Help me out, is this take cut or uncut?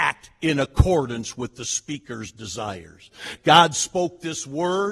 uncut